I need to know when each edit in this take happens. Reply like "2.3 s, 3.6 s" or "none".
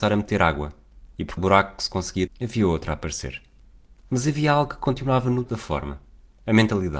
1.4 s, 2.3 s, 5.5 s